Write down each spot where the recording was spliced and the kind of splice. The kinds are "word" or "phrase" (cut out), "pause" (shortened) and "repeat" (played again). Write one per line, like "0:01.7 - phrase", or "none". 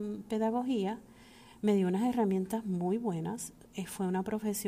none